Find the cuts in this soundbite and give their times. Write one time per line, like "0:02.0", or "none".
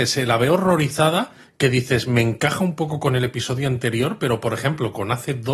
none